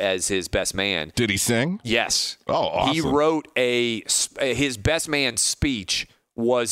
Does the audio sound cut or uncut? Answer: uncut